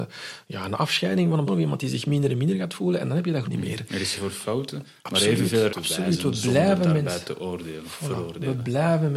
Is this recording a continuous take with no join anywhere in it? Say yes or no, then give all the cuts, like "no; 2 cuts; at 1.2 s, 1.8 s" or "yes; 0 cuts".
no; 4 cuts; at 1.5 s, 3.4 s, 4.2 s, 5.7 s